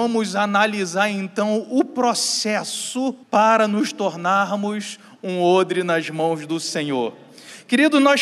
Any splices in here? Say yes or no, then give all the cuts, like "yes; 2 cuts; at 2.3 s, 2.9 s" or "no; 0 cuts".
yes; 1 cut; at 3.2 s